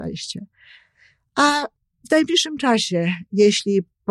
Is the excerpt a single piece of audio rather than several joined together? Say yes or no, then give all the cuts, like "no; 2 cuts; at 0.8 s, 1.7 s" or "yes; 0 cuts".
yes; 0 cuts